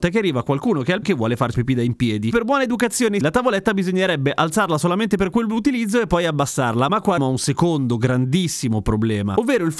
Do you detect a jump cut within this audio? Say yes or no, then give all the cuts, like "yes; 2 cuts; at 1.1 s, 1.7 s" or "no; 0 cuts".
yes; 5 cuts; at 1.0 s, 1.5 s, 2.3 s, 3.2 s, 7.2 s